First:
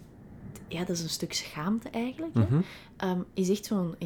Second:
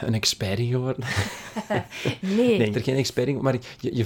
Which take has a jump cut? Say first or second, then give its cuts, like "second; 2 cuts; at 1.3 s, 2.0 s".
second; 1 cut; at 2.7 s